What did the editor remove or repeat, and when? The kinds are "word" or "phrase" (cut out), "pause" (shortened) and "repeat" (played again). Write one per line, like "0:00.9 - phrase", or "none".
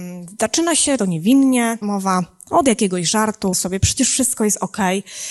0:01.0 - word
0:01.8 - phrase
0:03.5 - word